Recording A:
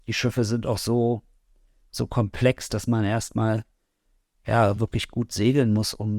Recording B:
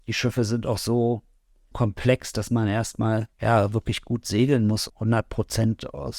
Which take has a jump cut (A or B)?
B